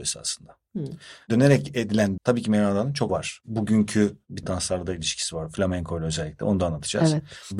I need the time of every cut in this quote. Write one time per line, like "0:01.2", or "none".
0:02.2
0:03.1
0:04.4